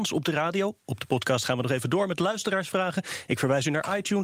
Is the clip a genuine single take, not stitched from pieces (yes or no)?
yes